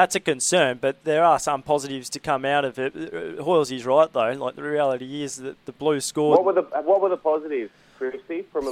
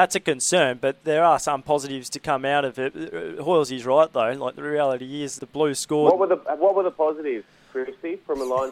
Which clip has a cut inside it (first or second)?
second